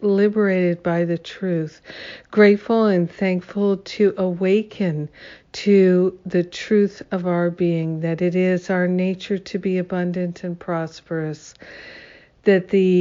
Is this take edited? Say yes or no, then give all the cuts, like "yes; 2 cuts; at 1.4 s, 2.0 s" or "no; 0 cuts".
no; 0 cuts